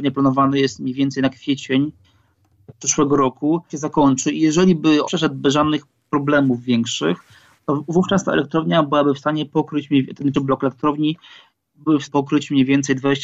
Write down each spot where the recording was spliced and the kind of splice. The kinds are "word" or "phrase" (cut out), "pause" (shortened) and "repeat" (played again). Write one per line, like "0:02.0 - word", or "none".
0:03.7 - word
0:05.0 - word
0:10.3 - word
0:12.1 - word